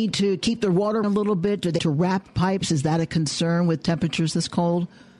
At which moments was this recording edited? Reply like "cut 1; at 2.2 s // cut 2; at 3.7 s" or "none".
cut 1; at 1.0 s // cut 2; at 1.8 s